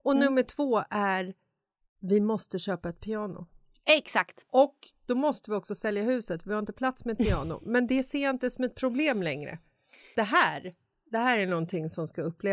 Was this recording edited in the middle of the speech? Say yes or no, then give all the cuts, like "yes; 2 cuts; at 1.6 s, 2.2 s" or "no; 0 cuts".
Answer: yes; 1 cut; at 10.1 s